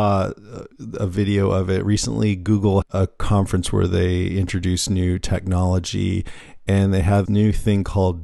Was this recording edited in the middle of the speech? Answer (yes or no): yes